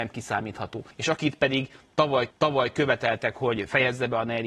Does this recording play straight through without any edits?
no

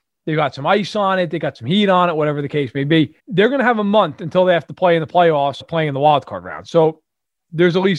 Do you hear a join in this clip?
yes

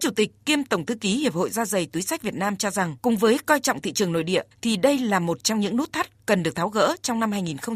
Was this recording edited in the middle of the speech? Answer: yes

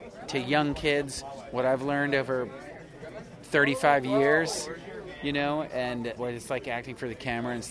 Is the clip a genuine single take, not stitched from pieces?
no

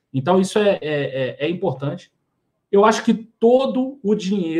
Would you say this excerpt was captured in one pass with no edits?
yes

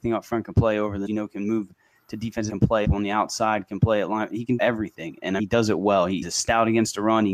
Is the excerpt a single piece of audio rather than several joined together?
no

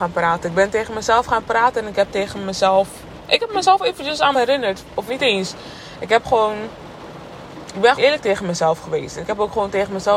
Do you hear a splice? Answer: yes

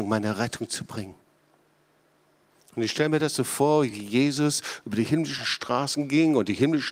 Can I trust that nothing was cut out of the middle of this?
yes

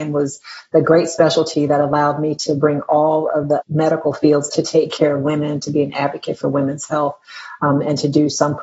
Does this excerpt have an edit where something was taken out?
yes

